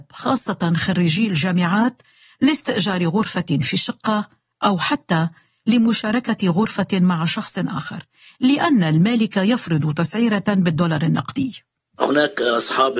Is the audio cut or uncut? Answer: uncut